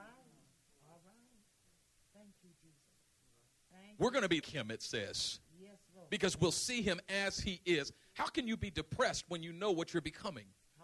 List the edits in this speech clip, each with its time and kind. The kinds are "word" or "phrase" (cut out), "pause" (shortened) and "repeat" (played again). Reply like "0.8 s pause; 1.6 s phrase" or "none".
4.4 s word

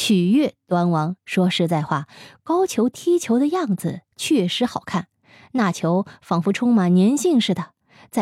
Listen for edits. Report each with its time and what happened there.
1.2 s pause

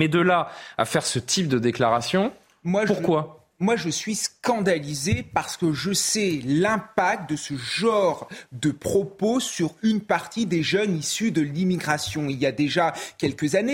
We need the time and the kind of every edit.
none

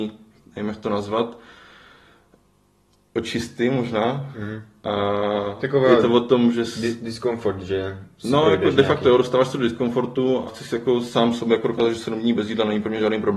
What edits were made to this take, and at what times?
10.5 s word

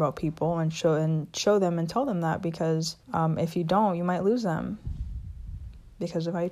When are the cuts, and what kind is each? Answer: 3.0 s pause

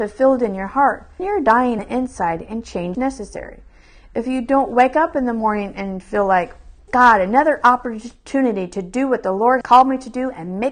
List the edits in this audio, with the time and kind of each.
1.2 s word; 1.8 s word; 2.9 s word; 6.9 s word; 9.6 s word

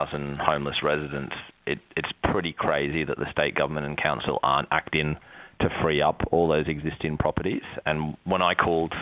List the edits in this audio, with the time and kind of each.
none

